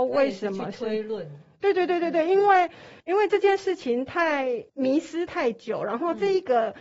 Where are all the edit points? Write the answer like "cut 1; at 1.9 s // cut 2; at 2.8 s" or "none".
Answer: cut 1; at 3.0 s // cut 2; at 4.7 s

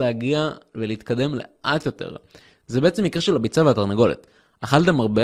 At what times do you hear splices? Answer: none

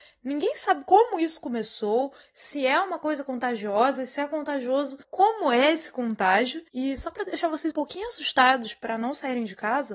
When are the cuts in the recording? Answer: cut 1; at 5.0 s // cut 2; at 6.7 s // cut 3; at 7.7 s

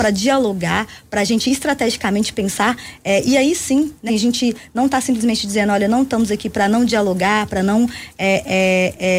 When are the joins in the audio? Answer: cut 1; at 4.1 s

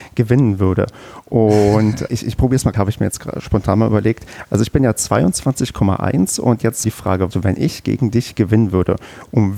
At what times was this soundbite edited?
cut 1; at 2.1 s // cut 2; at 2.7 s // cut 3; at 6.8 s // cut 4; at 7.3 s

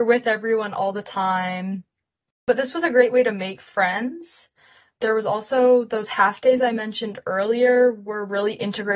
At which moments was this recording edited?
none

